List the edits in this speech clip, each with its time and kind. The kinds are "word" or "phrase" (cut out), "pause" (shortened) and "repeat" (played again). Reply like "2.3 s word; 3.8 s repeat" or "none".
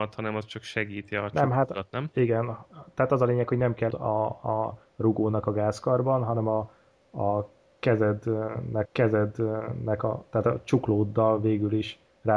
3.9 s word; 8.9 s repeat